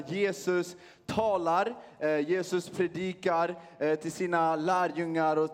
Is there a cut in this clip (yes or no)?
no